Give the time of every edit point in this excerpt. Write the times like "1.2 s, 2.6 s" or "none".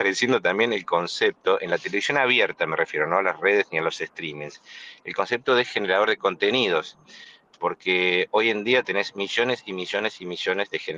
none